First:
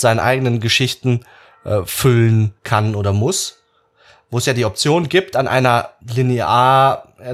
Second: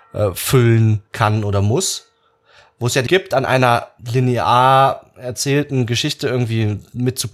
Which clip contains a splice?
second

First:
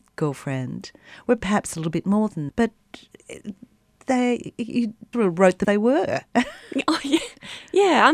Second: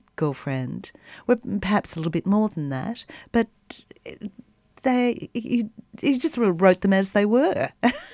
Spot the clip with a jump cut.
first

